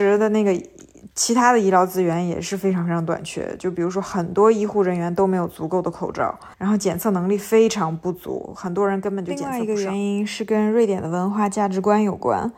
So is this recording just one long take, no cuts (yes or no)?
no